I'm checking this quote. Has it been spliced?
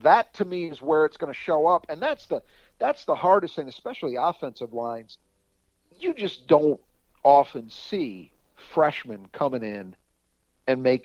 no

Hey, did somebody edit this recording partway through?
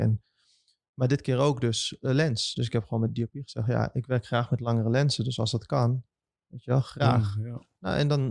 no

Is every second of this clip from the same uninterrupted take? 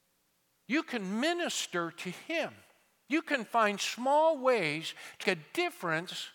no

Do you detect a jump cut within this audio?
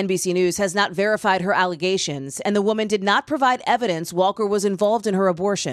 no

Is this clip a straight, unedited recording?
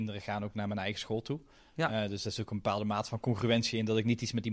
yes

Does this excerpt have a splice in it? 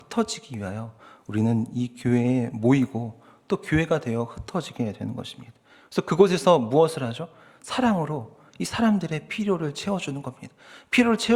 no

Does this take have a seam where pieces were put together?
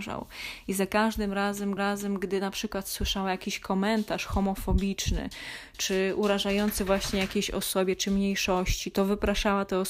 yes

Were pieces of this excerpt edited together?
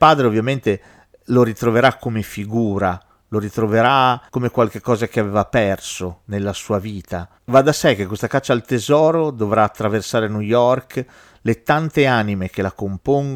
yes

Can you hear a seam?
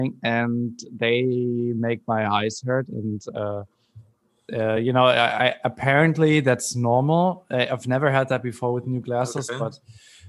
no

